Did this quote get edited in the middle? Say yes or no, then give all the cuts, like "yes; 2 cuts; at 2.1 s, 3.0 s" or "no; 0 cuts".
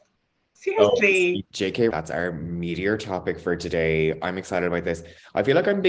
yes; 1 cut; at 1.9 s